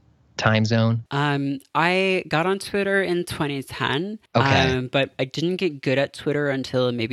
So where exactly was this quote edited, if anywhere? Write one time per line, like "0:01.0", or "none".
0:01.1
0:04.3